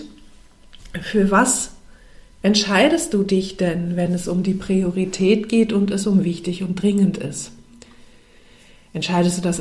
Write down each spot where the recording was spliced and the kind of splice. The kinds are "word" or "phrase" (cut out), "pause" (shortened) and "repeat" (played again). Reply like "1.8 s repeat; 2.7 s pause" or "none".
none